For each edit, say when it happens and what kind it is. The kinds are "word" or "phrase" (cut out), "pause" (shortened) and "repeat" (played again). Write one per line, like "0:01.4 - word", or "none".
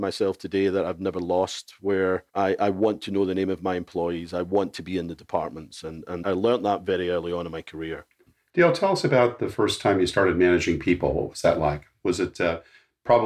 0:02.3 - pause
0:06.2 - word